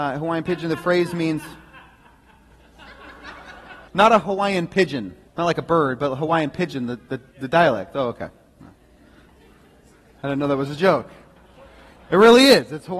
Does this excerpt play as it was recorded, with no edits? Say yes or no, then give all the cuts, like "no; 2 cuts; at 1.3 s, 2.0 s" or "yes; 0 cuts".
no; 3 cuts; at 3.9 s, 5.3 s, 7.3 s